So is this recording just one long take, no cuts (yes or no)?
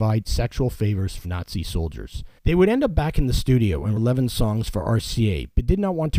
no